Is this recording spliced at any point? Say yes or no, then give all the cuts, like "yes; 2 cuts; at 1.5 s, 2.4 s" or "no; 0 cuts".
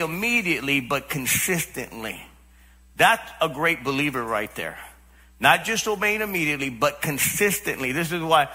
no; 0 cuts